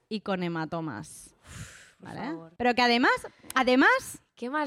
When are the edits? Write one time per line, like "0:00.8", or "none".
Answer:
0:02.6